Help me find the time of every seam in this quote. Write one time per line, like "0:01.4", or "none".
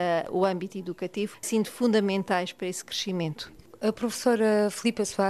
0:01.4